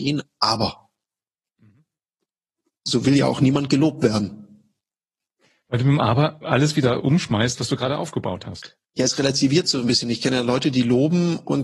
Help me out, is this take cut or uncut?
uncut